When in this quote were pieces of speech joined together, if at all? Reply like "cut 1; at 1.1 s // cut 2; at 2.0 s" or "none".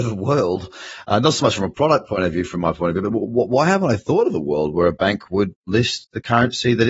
none